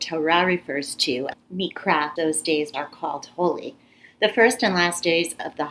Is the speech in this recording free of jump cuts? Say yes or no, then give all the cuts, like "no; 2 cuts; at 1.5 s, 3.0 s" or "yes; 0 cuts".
no; 3 cuts; at 1.3 s, 2.2 s, 2.7 s